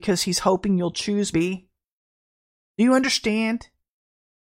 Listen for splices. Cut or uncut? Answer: cut